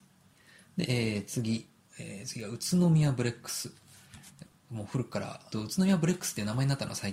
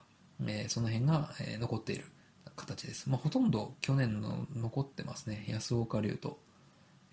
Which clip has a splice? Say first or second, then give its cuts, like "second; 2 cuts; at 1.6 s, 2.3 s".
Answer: first; 2 cuts; at 1.9 s, 5.5 s